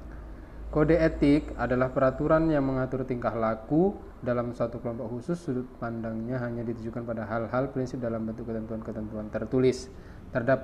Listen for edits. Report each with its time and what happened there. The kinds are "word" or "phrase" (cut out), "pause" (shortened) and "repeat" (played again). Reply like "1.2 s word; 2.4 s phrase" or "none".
none